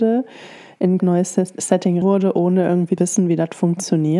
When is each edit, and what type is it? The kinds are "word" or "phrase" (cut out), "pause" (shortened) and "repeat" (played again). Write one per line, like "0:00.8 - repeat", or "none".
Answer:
0:01.0 - word
0:02.0 - word
0:03.0 - word

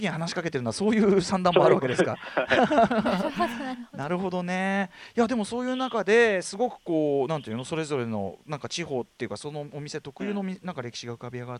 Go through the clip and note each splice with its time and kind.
none

